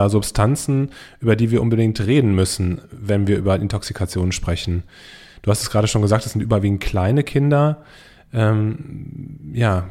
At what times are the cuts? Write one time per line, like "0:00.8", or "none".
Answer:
none